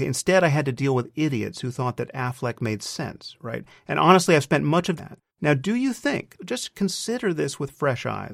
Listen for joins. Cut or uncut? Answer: cut